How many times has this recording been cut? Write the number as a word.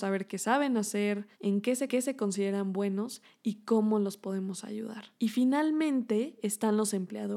three